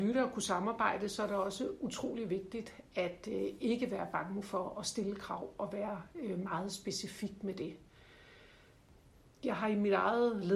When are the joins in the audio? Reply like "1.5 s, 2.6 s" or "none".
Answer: none